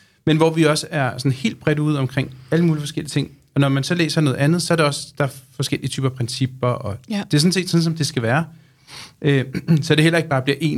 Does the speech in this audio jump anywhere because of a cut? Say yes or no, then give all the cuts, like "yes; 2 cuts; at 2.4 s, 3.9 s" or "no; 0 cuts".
no; 0 cuts